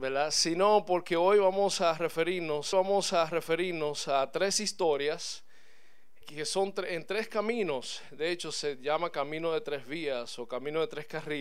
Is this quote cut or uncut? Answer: cut